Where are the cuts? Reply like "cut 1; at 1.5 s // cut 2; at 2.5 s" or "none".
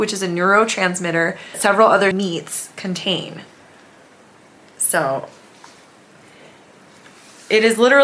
cut 1; at 1.5 s // cut 2; at 2.1 s